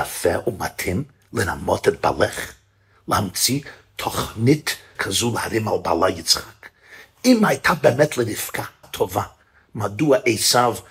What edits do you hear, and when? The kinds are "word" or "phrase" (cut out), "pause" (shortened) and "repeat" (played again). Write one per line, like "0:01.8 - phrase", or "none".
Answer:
0:05.0 - word
0:08.8 - word